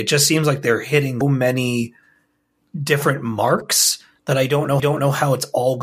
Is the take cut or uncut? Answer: cut